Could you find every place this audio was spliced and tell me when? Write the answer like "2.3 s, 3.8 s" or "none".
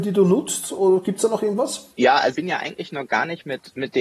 1.9 s, 2.3 s